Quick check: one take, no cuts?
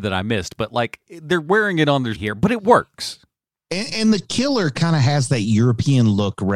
no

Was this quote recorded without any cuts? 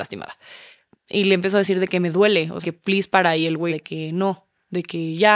no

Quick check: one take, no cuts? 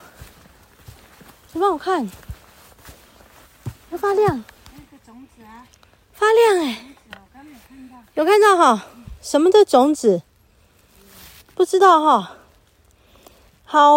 yes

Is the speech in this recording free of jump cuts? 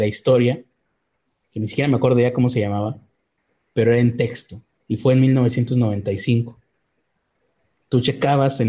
yes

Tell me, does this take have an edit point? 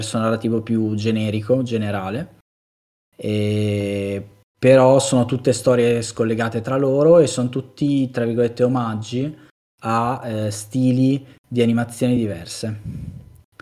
no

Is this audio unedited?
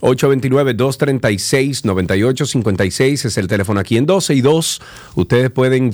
yes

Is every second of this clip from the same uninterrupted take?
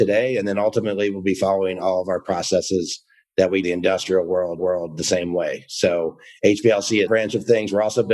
no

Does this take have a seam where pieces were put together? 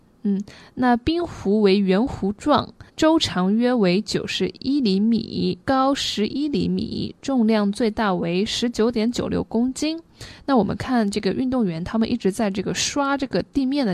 yes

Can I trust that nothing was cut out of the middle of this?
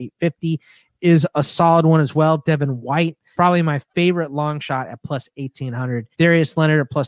no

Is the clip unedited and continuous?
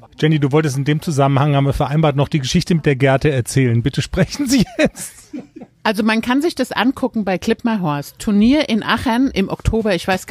yes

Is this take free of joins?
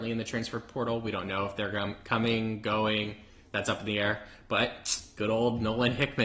yes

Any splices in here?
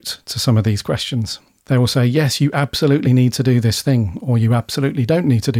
no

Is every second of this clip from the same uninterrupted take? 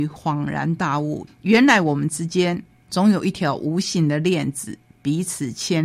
yes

